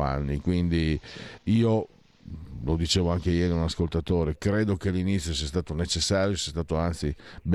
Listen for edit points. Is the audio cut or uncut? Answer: cut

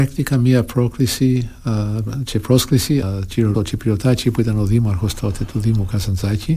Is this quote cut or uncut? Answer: cut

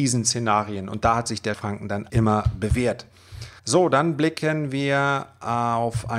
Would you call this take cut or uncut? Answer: cut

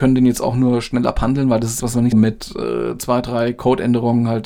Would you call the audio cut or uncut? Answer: cut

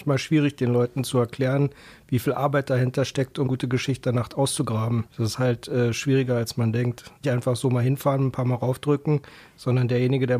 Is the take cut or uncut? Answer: cut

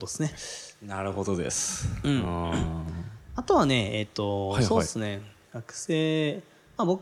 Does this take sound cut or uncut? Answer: uncut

